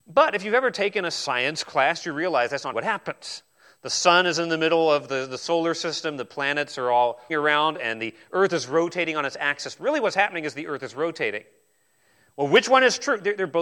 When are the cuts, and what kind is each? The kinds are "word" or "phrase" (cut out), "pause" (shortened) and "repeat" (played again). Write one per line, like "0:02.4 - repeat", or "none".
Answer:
0:02.7 - word
0:07.3 - word

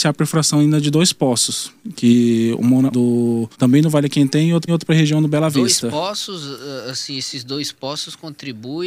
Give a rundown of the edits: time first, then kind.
0:02.9 - phrase
0:03.5 - pause
0:04.7 - repeat

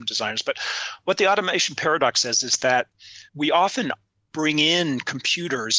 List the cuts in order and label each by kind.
0:03.3 - pause

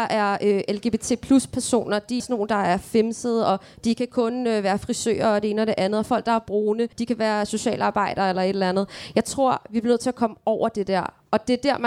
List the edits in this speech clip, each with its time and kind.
0:02.2 - word
0:06.9 - pause

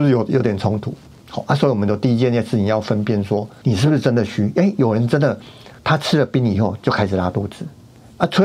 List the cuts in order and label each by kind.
0:03.6 - word
0:05.8 - pause

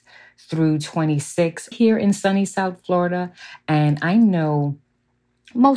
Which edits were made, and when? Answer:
0:01.7 - word

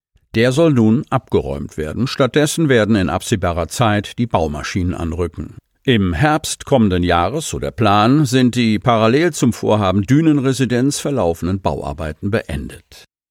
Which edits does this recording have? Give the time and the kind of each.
none

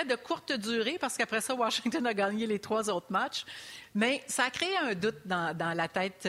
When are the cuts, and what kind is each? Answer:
none

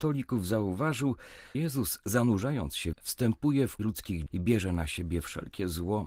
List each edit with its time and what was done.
0:01.5 - word
0:02.9 - word
0:03.8 - word
0:04.3 - word

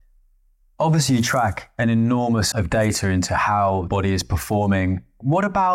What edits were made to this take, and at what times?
0:02.5 - word
0:03.9 - word

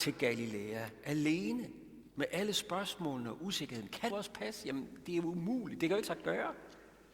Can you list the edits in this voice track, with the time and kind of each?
0:02.1 - pause
0:04.1 - phrase
0:06.0 - word

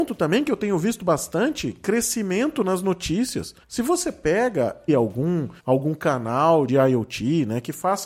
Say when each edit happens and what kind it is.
0:03.6 - pause
0:04.9 - phrase
0:05.6 - pause
0:06.7 - phrase

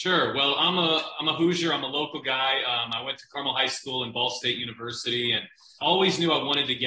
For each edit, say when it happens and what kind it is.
0:05.8 - word

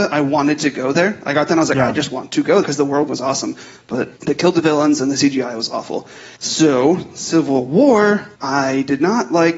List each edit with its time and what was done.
0:02.6 - word
0:03.1 - word
0:04.2 - pause
0:06.3 - pause
0:08.3 - pause

